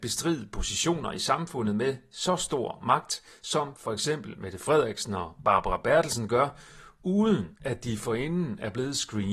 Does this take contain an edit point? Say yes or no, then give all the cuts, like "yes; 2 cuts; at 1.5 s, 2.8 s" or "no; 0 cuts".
no; 0 cuts